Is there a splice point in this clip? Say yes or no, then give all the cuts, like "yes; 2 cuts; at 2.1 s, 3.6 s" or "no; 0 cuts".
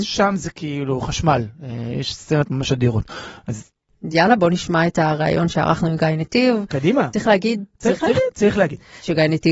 no; 0 cuts